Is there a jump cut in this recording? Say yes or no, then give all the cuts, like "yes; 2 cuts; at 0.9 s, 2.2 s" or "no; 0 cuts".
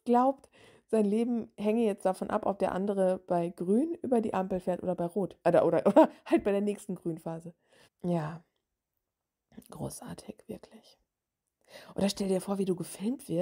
yes; 2 cuts; at 5.4 s, 7.8 s